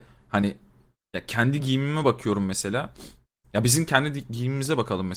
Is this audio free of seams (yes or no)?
yes